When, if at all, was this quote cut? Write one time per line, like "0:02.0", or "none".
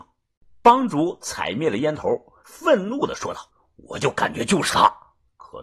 0:02.4
0:03.5